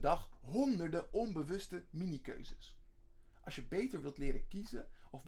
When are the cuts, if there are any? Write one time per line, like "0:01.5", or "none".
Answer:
none